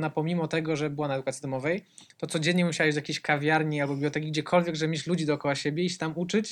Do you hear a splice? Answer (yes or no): no